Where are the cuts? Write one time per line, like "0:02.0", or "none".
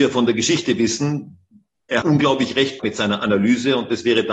0:02.0
0:02.8